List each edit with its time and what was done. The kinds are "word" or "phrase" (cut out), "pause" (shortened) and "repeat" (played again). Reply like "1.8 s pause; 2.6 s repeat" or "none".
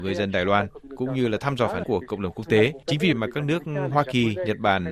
1.8 s word; 3.1 s word

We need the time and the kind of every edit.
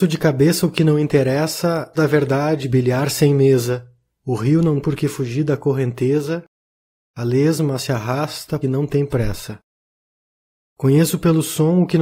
1.9 s phrase; 2.6 s word; 4.1 s pause; 4.8 s word; 7.8 s word; 8.6 s word

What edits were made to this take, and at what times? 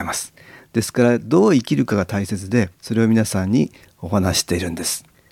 2.7 s pause

